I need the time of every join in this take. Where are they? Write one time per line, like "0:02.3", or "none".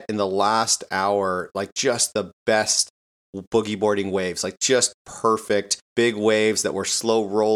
0:05.8